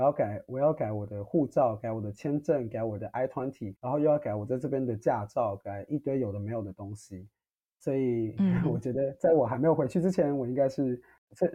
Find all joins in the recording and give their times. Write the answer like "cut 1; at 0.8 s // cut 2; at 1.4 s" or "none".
cut 1; at 3.8 s // cut 2; at 7.5 s